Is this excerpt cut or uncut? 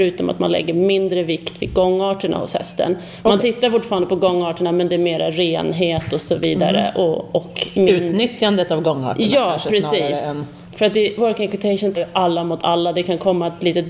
cut